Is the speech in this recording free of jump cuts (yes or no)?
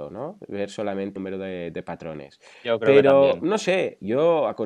no